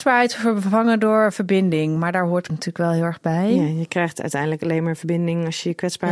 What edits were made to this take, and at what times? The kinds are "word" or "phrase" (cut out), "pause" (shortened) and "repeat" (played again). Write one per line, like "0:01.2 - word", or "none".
0:02.5 - word